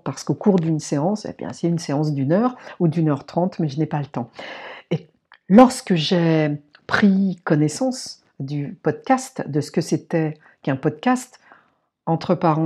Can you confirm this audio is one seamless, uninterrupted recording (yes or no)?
yes